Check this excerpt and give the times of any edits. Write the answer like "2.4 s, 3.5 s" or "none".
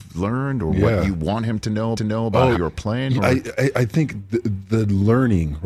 1.9 s, 2.5 s, 3.2 s